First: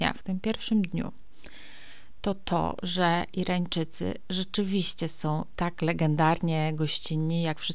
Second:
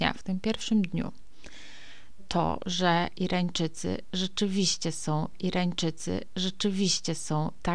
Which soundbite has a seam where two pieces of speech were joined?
second; 2 cuts; at 2.2 s, 5.3 s

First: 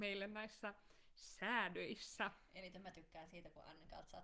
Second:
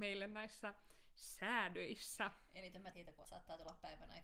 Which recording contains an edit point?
second; 2 cuts; at 2.9 s, 3.2 s

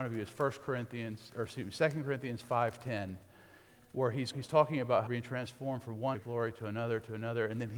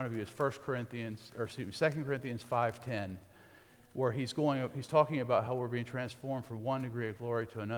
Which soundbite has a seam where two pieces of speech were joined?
first; 3 cuts; at 4.3 s, 5.1 s, 6.1 s

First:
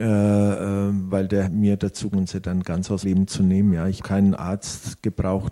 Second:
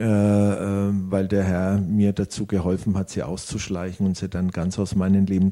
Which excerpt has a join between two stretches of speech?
first; 4 cuts; at 1.4 s, 2.1 s, 3.0 s, 4.0 s

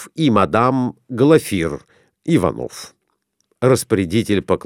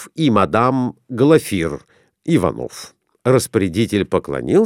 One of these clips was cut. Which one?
second; 1 cut; at 3.1 s

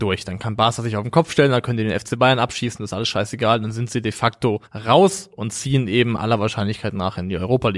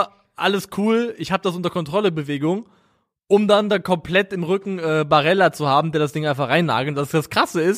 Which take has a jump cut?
first; 1 cut; at 4.7 s

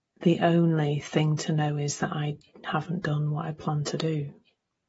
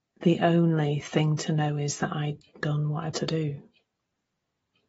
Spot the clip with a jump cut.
second; 2 cuts; at 2.6 s, 3.1 s

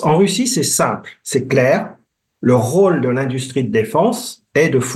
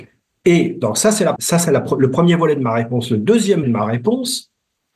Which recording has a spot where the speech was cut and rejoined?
second; 2 cuts; at 1.4 s, 3.6 s

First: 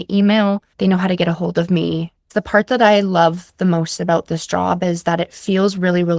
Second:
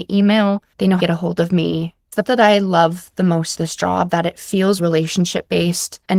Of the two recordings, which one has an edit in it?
second; 5 cuts; at 1.0 s, 2.2 s, 3.5 s, 4.1 s, 4.8 s

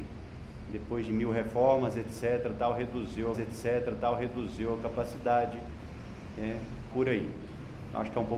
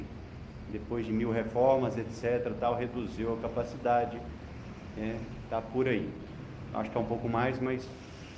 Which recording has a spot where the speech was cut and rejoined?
first; 2 cuts; at 3.3 s, 6.9 s

